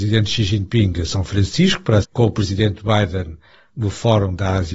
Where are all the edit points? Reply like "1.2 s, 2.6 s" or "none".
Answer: 2.0 s